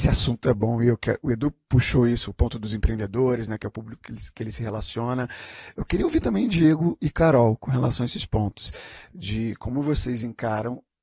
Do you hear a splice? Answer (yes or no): no